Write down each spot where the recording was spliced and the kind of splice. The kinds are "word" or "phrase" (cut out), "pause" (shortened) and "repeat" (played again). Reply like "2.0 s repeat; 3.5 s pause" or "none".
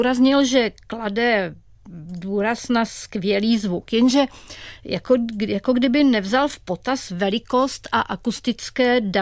none